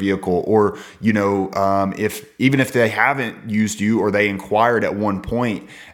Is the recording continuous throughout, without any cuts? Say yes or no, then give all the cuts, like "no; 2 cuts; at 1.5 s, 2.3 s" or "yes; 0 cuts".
yes; 0 cuts